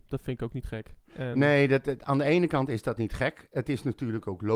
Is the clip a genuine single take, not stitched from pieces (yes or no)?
yes